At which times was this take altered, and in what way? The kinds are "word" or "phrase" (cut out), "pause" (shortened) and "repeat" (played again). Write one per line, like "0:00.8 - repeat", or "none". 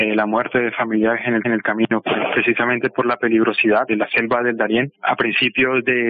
0:01.4 - repeat
0:03.9 - word
0:04.9 - pause